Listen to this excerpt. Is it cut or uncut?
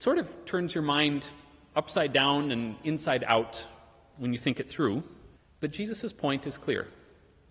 cut